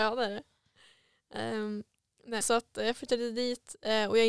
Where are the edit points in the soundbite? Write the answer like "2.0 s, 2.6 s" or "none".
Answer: 2.4 s